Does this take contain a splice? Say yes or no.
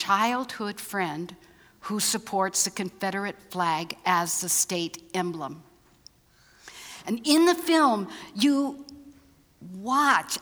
no